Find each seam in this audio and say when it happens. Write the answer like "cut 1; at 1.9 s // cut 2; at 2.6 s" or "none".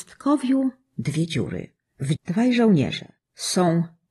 cut 1; at 2.2 s